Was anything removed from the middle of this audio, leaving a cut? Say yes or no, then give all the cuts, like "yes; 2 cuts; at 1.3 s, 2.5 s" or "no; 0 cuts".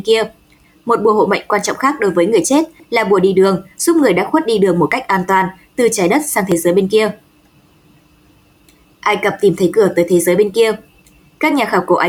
no; 0 cuts